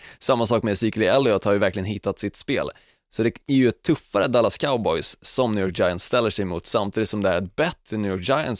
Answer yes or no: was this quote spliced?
no